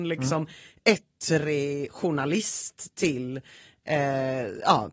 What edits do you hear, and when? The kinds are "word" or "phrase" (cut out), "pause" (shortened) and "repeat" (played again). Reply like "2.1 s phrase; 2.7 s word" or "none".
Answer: none